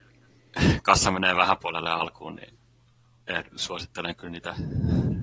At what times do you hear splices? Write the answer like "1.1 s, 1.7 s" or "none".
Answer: 1.6 s